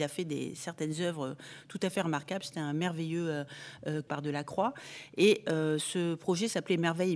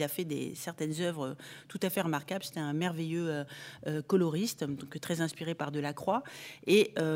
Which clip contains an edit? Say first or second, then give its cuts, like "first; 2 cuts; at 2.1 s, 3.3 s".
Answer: first; 1 cut; at 4.1 s